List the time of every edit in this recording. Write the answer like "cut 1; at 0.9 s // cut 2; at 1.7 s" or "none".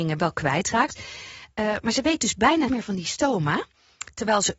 cut 1; at 2.7 s